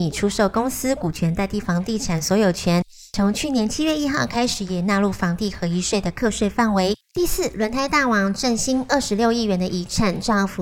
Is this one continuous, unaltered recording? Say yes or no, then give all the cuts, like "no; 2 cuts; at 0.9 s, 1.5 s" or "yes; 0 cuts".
no; 1 cut; at 7.0 s